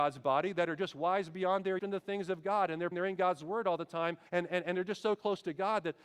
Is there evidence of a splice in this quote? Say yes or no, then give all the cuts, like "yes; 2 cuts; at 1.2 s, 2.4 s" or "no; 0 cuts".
yes; 3 cuts; at 1.8 s, 2.9 s, 4.3 s